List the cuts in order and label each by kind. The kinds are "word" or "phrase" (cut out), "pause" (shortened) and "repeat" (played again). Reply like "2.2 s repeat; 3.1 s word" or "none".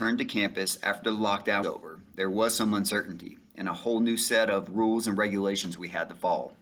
1.6 s word